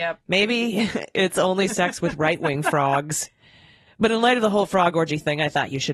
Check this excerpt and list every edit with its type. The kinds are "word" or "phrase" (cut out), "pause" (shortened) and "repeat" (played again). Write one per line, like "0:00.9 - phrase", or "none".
none